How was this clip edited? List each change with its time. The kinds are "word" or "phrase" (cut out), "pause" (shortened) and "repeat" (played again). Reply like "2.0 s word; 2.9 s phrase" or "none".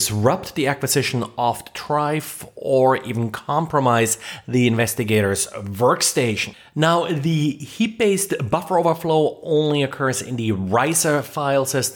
none